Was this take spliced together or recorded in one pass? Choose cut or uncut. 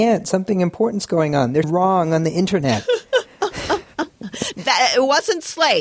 cut